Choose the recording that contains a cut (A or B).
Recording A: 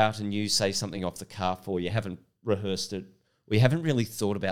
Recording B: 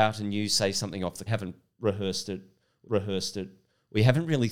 B